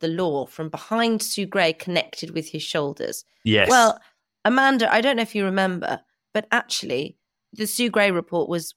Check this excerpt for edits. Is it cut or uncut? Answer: uncut